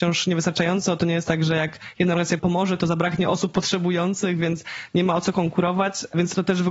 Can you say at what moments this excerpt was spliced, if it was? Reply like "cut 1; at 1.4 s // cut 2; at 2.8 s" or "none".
none

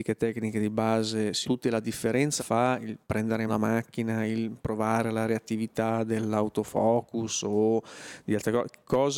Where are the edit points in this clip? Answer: cut 1; at 1.4 s // cut 2; at 2.4 s // cut 3; at 3.5 s

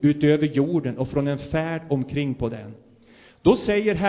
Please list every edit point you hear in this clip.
none

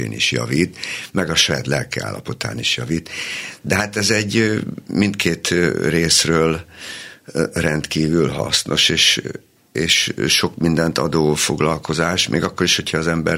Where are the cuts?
none

